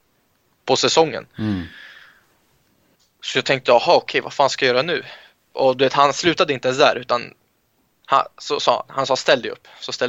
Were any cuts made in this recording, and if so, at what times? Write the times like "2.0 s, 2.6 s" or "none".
none